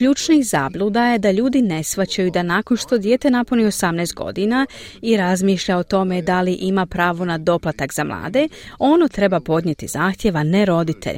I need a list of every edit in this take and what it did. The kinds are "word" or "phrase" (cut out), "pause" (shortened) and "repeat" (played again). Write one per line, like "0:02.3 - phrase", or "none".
none